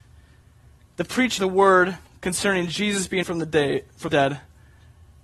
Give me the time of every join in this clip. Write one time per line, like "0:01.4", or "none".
0:01.4
0:03.2
0:04.1